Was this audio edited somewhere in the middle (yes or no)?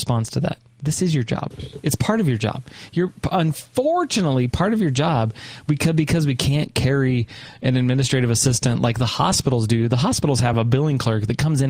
no